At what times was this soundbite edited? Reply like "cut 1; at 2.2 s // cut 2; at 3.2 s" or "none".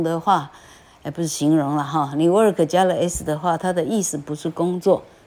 none